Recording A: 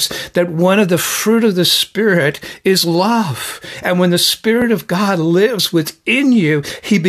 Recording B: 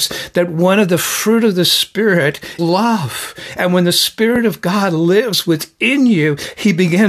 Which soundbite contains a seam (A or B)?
B